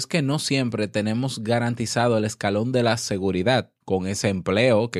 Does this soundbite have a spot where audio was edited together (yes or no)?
yes